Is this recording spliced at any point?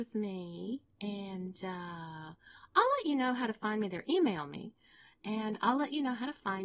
no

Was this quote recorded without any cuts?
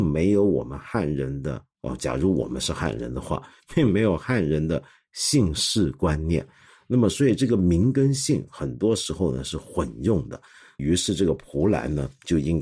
yes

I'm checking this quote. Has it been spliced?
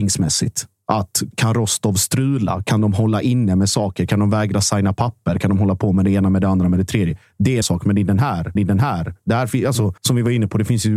yes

